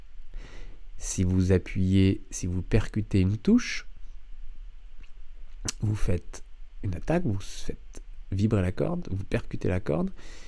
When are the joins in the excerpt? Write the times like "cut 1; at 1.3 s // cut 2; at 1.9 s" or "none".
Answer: none